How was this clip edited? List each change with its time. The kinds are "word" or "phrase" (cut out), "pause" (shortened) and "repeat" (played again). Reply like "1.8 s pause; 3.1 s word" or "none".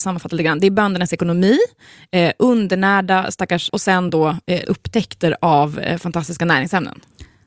3.7 s word; 4.7 s word